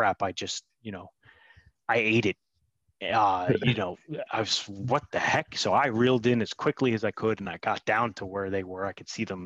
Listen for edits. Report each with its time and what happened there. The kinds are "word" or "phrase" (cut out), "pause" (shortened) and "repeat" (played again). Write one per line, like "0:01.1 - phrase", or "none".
none